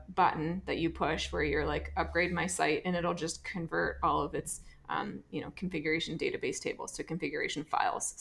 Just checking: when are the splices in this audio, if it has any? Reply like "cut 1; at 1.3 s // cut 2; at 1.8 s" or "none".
none